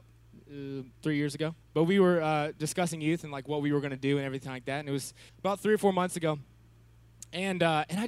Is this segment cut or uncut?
cut